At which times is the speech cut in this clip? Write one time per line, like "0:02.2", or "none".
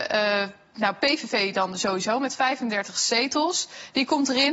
none

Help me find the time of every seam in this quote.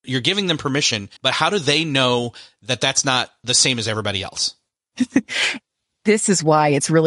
0:01.2

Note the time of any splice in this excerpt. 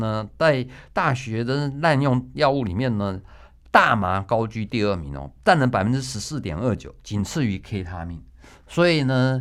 none

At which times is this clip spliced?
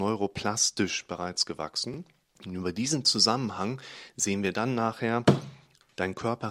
0:02.3

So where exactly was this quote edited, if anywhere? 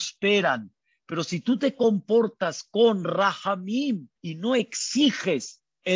0:04.2

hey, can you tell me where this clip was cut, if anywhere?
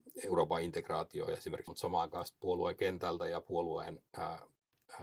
0:01.7

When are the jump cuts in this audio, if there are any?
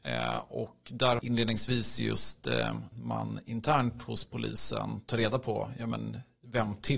0:01.2
0:02.9

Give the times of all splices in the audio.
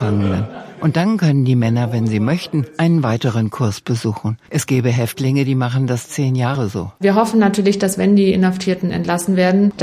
0:04.4
0:07.0

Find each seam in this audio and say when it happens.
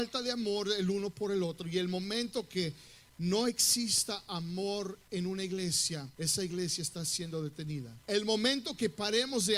0:06.1
0:08.0

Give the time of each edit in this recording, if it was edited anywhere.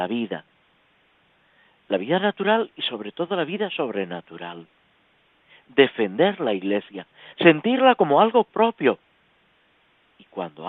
none

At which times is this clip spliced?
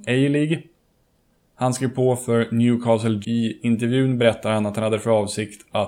0:03.2

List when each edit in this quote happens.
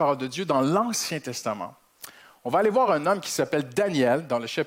none

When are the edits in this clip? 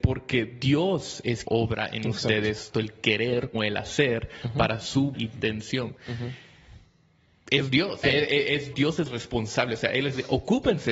0:01.4
0:02.7
0:03.5
0:05.1
0:08.0
0:08.7

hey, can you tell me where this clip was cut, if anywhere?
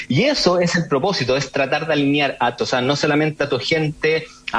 0:02.6

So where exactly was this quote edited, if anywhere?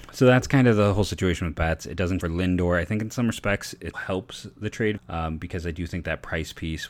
0:02.2
0:03.9
0:05.0

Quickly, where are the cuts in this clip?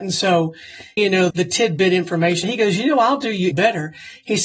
0:01.0
0:01.3
0:02.4
0:03.5

